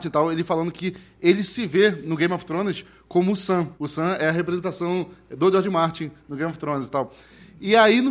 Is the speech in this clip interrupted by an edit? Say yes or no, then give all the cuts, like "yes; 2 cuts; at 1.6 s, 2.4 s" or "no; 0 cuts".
yes; 1 cut; at 3.7 s